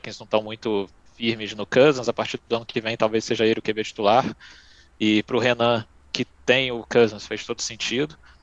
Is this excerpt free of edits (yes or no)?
yes